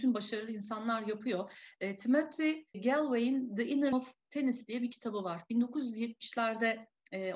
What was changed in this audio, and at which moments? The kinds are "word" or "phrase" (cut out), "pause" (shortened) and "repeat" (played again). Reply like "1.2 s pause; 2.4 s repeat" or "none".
2.7 s word; 3.9 s word

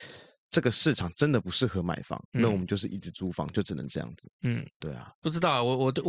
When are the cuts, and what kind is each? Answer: 2.2 s pause; 4.4 s pause

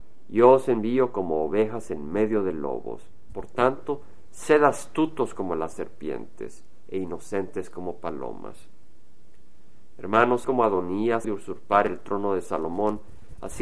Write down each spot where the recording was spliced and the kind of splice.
10.4 s word; 11.2 s word

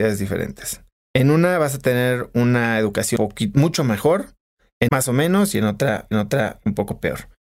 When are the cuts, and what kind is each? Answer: 3.2 s word; 4.9 s word; 6.1 s repeat

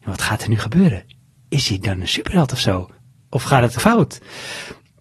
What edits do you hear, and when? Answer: 3.8 s word

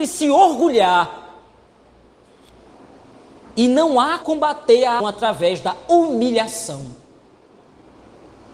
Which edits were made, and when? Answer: 4.2 s word; 5.0 s phrase

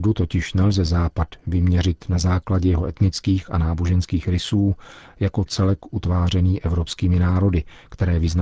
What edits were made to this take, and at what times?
none

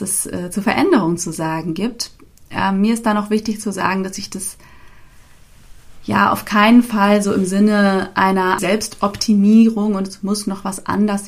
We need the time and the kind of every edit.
8.6 s word

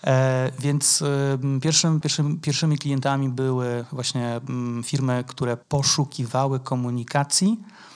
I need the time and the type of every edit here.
2.0 s word; 5.6 s pause

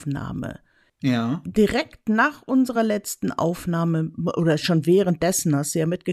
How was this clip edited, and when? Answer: none

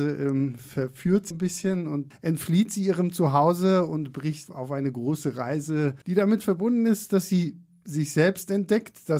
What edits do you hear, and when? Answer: 1.3 s word; 2.1 s word; 4.5 s word; 6.0 s pause

